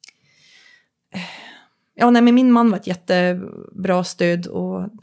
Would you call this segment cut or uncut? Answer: uncut